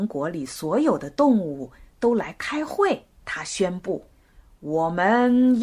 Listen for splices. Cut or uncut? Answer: cut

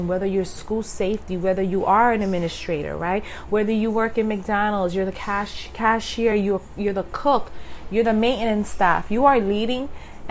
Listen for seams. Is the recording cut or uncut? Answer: uncut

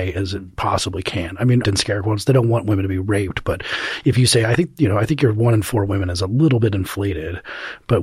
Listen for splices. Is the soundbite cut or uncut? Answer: cut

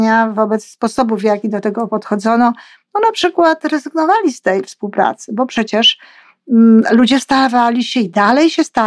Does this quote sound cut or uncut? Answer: uncut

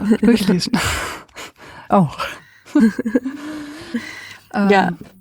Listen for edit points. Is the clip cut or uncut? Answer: cut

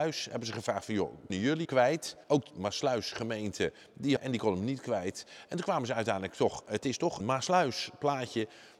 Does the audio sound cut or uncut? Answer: cut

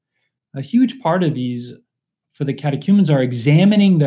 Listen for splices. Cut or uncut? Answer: uncut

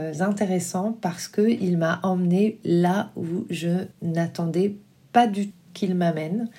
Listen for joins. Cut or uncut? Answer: cut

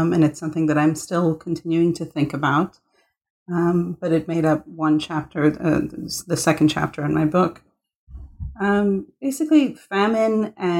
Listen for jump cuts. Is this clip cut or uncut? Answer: uncut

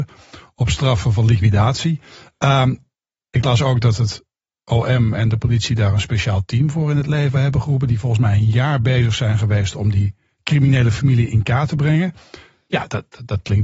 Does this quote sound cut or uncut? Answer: uncut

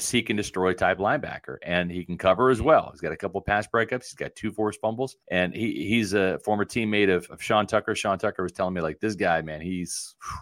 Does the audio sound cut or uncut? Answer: cut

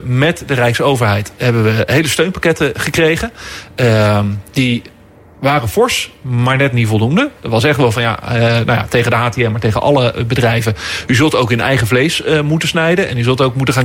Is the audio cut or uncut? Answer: uncut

